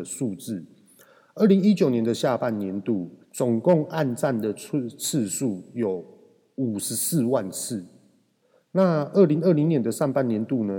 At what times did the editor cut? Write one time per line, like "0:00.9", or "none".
0:03.2